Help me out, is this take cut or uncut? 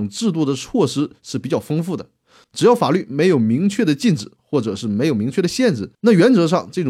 cut